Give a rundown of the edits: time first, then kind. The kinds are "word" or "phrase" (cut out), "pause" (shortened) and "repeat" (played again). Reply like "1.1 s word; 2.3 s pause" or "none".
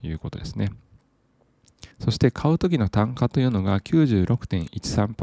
1.9 s pause